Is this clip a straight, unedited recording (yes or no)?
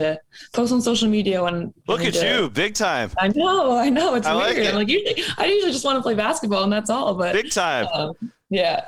yes